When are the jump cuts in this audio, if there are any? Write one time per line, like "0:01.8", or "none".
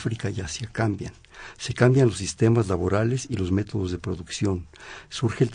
none